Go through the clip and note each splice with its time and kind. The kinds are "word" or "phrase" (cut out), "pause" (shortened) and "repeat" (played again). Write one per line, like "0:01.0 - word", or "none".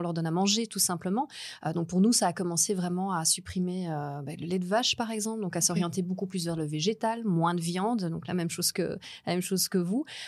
none